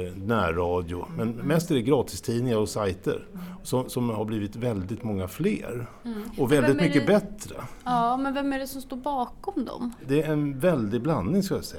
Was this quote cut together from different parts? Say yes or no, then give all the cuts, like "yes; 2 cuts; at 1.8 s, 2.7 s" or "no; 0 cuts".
no; 0 cuts